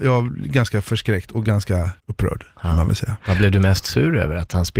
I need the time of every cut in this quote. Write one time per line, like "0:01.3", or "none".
0:02.0